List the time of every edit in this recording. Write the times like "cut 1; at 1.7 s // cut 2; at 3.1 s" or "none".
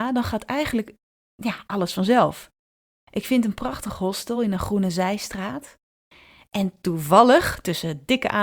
none